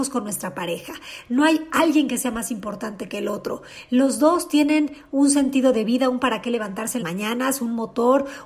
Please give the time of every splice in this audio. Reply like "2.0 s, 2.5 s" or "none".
7.0 s